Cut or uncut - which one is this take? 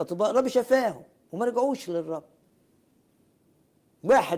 uncut